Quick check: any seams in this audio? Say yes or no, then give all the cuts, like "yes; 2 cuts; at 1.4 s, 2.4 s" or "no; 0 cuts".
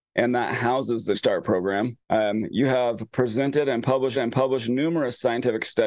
yes; 3 cuts; at 1.1 s, 2.0 s, 4.1 s